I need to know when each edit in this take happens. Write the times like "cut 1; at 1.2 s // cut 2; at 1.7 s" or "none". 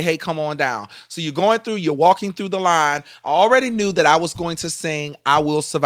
none